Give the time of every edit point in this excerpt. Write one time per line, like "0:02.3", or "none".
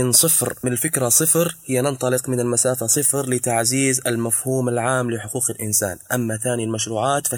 none